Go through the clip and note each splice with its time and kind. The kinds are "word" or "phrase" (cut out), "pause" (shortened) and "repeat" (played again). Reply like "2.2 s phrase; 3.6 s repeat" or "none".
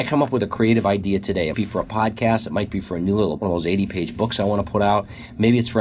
1.5 s word; 3.4 s word